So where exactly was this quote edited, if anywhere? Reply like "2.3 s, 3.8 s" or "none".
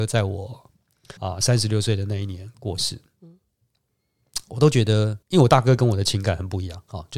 1.2 s, 5.2 s

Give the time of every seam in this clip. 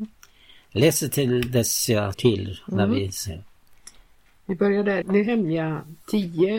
2.1 s, 5.0 s

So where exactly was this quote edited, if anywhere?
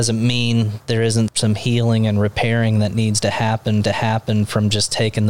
1.3 s, 3.8 s

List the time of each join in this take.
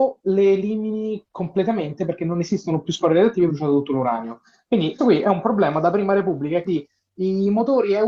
1.3 s, 3.5 s, 5.0 s, 6.6 s

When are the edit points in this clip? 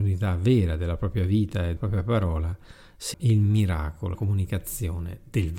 1.8 s, 3.1 s, 4.1 s

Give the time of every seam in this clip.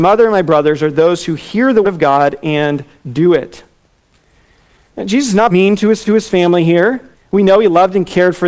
1.8 s, 5.5 s, 6.1 s, 7.1 s

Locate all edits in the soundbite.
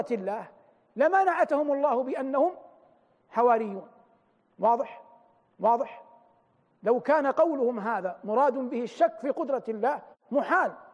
5.5 s

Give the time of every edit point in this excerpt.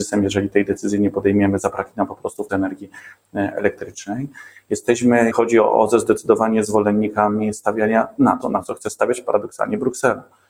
2.5 s, 5.3 s, 8.4 s

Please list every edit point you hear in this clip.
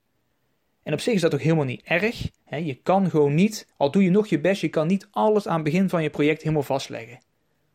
2.4 s, 3.7 s

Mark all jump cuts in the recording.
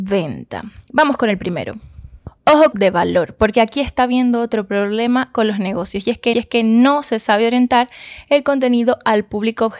2.7 s, 6.3 s

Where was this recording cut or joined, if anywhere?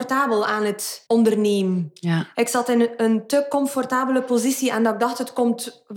1.1 s

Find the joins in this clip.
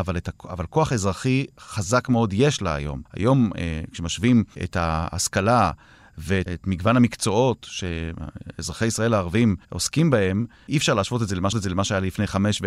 3.1 s, 6.5 s, 9.6 s, 11.5 s

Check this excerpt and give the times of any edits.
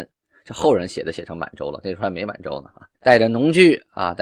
2.9 s

